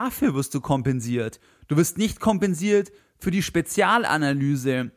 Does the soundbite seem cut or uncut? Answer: uncut